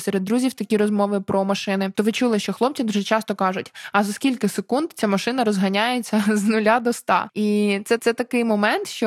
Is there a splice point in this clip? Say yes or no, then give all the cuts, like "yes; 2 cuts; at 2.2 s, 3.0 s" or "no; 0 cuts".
yes; 1 cut; at 8.0 s